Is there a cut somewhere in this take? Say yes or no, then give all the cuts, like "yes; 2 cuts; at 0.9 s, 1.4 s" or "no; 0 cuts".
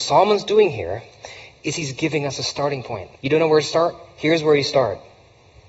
yes; 1 cut; at 3.2 s